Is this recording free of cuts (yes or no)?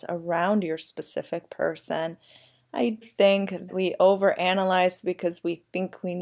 no